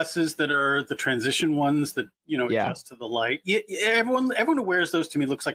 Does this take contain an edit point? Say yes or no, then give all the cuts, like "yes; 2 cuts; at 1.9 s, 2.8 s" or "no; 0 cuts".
no; 0 cuts